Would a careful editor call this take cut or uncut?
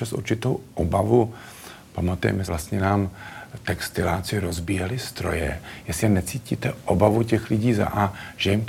cut